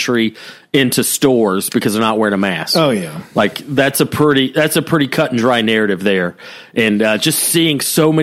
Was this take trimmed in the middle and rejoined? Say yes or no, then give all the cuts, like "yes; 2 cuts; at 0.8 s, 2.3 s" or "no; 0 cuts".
no; 0 cuts